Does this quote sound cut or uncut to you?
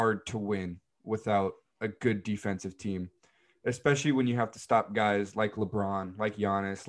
uncut